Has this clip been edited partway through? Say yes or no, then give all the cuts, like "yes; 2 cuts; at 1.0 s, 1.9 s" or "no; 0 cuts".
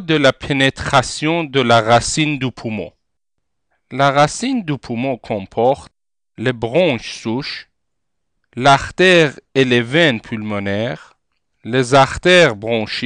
no; 0 cuts